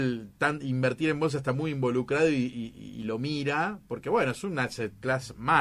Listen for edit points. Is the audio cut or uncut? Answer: uncut